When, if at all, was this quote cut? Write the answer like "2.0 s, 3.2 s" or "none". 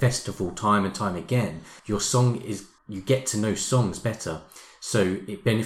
1.8 s, 2.8 s